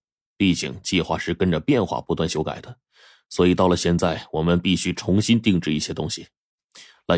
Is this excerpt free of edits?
yes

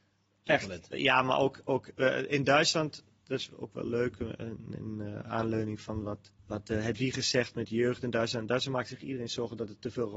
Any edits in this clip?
yes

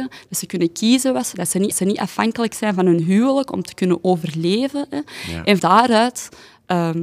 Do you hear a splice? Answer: yes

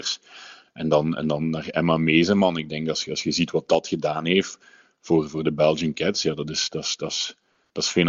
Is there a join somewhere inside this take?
no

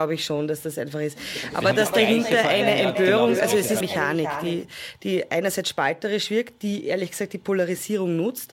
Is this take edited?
yes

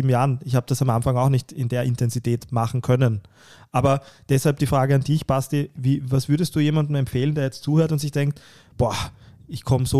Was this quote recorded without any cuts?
yes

